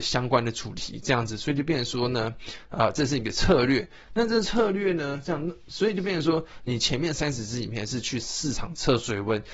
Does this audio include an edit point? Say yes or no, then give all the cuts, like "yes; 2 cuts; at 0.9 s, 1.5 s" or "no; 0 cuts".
no; 0 cuts